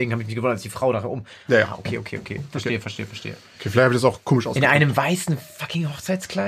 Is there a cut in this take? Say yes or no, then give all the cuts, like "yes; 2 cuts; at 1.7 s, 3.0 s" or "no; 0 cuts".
no; 0 cuts